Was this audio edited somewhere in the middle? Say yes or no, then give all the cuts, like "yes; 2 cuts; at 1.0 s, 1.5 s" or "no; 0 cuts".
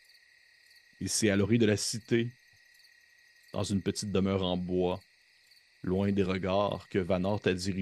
no; 0 cuts